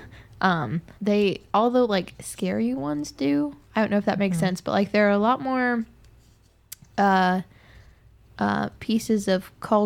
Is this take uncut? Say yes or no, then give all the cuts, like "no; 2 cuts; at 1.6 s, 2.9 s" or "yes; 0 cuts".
no; 1 cut; at 1.0 s